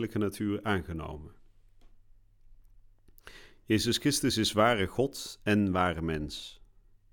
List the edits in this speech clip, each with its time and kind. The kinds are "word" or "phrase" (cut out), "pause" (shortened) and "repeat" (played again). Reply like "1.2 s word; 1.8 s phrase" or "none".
none